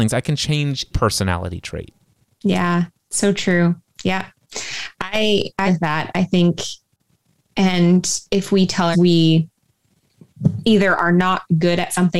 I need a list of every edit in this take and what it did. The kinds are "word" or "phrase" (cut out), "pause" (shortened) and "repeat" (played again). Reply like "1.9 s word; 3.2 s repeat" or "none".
0.9 s word; 5.7 s word; 8.3 s pause; 8.9 s word